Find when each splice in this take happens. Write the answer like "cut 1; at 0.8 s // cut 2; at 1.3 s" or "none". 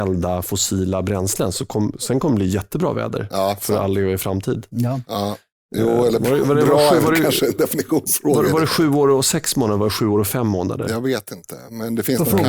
none